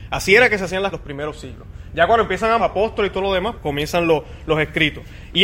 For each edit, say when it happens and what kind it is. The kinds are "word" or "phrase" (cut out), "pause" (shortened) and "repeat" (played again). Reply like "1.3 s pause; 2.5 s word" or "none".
0.9 s phrase; 2.6 s phrase; 3.5 s word

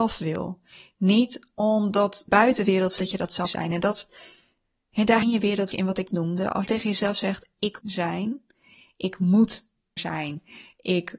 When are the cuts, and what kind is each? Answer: 2.3 s word; 3.0 s word; 3.5 s word; 5.2 s word; 5.7 s word; 6.1 s word; 6.7 s word; 7.8 s word; 10.0 s word

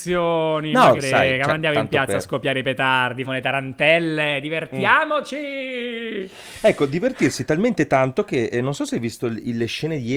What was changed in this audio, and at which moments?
1.0 s word; 3.2 s word

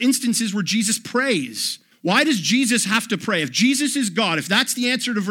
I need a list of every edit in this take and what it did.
1.9 s pause

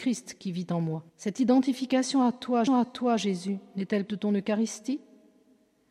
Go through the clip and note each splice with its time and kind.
1.1 s pause; 2.7 s repeat; 4.1 s phrase

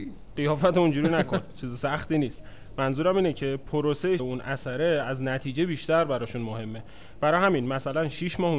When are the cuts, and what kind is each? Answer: 4.2 s word

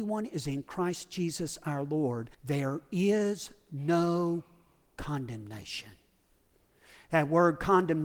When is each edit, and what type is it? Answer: 2.3 s pause

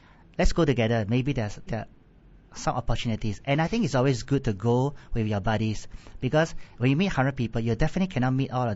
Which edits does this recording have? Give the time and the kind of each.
1.7 s word

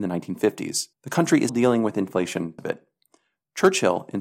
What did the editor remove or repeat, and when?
0.9 s pause; 1.5 s word; 2.6 s word

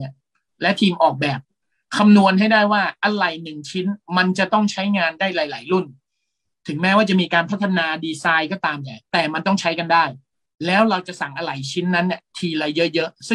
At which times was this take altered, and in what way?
9.1 s pause

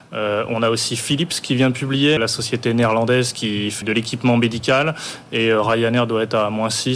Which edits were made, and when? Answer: 2.2 s word; 3.8 s word

